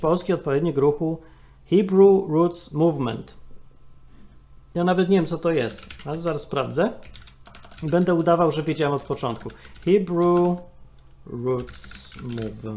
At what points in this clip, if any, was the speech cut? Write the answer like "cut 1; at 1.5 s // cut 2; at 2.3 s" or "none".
none